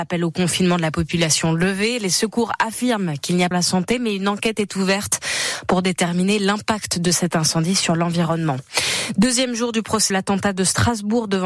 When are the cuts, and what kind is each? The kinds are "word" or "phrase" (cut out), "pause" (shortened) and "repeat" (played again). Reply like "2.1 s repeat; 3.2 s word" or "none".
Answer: 3.5 s phrase; 10.1 s word